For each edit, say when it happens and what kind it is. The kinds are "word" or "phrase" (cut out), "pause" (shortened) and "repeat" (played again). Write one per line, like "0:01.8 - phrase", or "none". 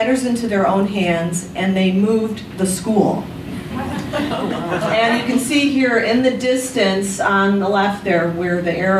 none